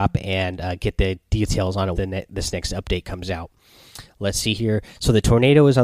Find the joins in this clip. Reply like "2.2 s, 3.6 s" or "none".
2.0 s